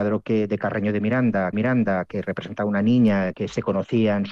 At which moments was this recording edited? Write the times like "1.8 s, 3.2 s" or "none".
1.5 s, 3.3 s